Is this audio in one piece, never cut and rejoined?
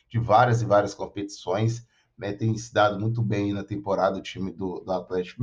yes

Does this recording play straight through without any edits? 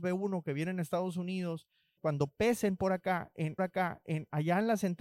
no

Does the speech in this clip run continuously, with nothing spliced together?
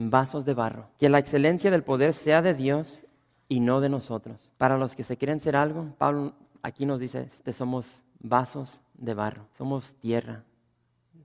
no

